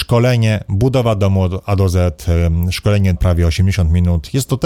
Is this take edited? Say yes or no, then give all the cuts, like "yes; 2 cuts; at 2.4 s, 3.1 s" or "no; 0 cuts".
yes; 1 cut; at 3.2 s